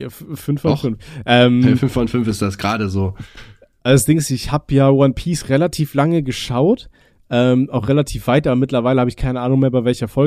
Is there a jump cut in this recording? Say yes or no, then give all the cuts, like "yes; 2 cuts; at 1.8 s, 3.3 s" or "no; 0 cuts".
no; 0 cuts